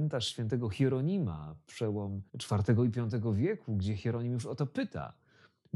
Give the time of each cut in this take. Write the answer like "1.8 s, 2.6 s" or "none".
2.3 s